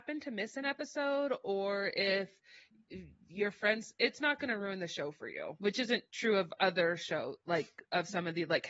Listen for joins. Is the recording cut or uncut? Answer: uncut